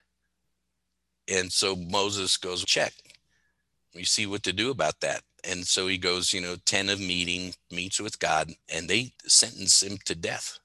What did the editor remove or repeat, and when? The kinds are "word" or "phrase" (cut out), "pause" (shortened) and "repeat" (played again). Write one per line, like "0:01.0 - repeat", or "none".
0:02.6 - phrase
0:08.6 - pause
0:09.2 - pause